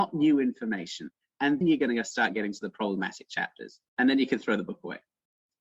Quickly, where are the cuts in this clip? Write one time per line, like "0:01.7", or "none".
0:01.6